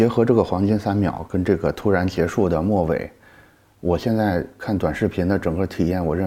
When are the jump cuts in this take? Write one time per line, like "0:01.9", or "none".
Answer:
none